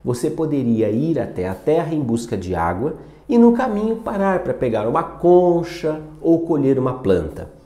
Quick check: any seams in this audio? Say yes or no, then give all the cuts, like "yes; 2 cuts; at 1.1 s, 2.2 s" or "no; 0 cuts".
no; 0 cuts